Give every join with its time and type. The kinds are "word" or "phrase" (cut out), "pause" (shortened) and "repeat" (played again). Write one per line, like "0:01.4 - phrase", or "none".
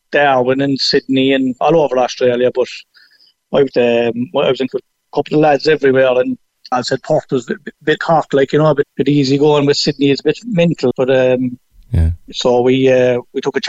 0:03.7 - word
0:04.7 - word
0:06.7 - word
0:08.0 - word
0:08.8 - word
0:10.9 - word